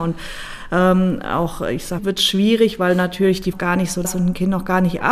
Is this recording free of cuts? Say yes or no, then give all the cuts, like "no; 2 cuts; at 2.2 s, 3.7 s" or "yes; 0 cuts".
no; 3 cuts; at 2.0 s, 3.5 s, 4.0 s